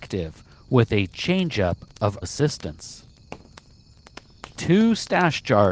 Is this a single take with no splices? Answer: no; 1 cut; at 2.2 s

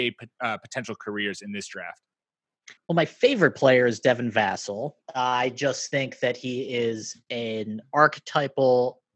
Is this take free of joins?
no; 2 cuts; at 2.8 s, 5.0 s

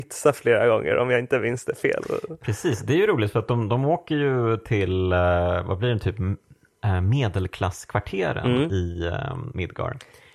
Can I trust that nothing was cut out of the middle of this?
yes; 0 cuts

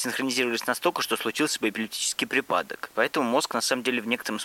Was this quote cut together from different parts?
no; 0 cuts

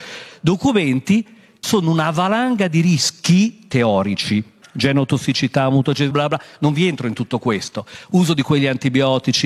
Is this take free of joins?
no; 3 cuts; at 1.6 s, 4.6 s, 6.1 s

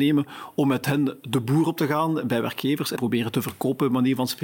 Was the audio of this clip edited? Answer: yes; 1 cut; at 3.0 s

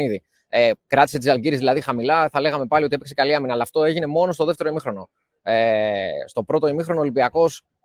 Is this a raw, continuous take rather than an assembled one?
yes; 0 cuts

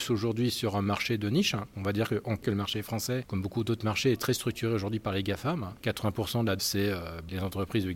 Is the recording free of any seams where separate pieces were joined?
no; 2 cuts; at 2.4 s, 6.6 s

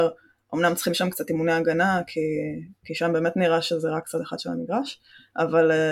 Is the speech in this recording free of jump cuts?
yes; 0 cuts

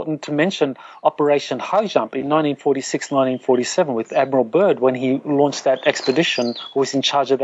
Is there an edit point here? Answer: no; 0 cuts

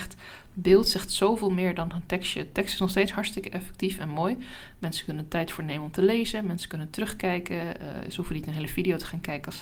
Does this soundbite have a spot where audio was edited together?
no; 0 cuts

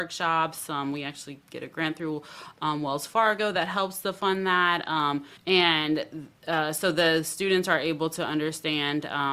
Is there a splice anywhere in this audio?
yes; 1 cut; at 5.4 s

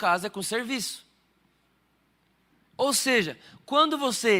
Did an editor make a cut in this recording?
no; 0 cuts

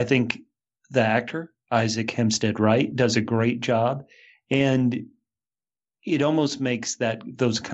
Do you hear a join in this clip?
no; 0 cuts

